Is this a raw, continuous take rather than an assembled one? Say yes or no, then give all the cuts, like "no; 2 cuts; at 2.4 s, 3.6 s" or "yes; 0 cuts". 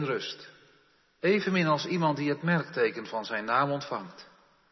yes; 0 cuts